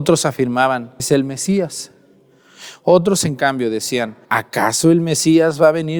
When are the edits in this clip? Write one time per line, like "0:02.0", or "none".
0:01.0
0:04.2